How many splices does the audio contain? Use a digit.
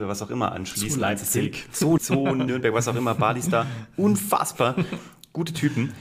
2